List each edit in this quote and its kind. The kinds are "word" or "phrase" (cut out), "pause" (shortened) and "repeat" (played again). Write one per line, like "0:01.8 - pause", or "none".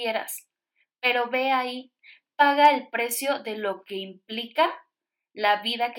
none